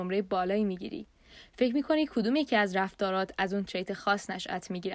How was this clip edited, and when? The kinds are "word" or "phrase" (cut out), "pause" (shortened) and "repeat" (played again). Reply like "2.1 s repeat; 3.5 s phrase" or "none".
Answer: none